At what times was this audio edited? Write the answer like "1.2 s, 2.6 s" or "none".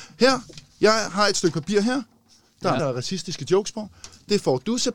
2.8 s